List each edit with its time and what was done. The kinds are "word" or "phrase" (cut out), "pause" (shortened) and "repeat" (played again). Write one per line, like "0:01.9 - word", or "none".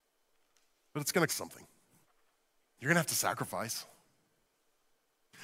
0:01.3 - word
0:02.0 - pause